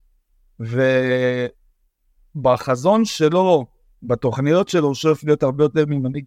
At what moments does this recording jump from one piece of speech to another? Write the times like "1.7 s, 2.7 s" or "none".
none